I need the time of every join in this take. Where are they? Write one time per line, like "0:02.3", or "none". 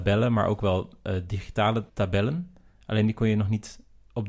0:01.9